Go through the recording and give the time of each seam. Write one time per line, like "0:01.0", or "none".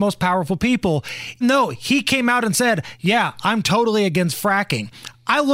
0:01.4